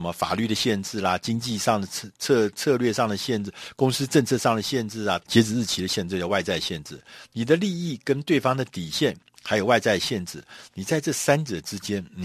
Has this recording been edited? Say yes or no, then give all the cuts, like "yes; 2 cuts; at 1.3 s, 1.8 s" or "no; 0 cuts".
yes; 1 cut; at 5.2 s